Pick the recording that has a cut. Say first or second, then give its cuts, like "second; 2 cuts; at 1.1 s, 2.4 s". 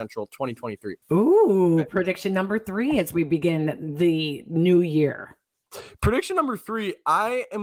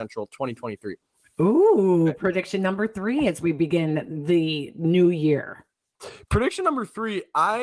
first; 1 cut; at 1.0 s